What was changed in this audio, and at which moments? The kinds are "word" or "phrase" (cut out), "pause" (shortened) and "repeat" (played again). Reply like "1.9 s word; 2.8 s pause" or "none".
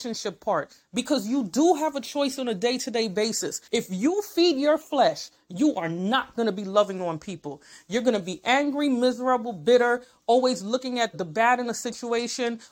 3.7 s pause; 11.1 s word

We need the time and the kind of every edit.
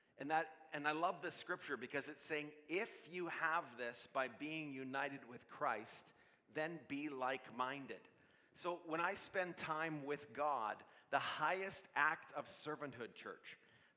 none

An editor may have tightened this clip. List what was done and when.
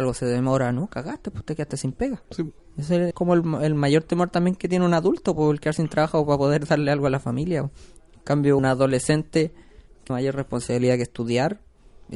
2.2 s pause; 3.1 s word; 8.6 s word; 10.1 s phrase

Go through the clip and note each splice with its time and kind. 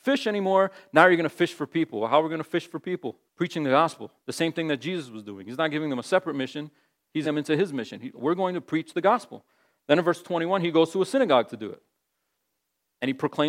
3.3 s pause; 4.2 s pause; 7.2 s word

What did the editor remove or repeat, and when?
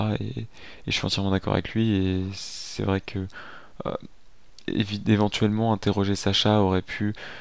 none

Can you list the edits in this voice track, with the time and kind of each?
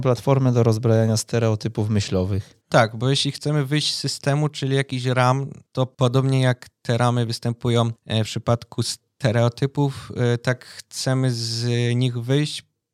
2.6 s pause; 5.7 s pause

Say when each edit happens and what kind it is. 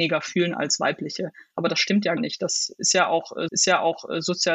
2.2 s word; 3.5 s repeat

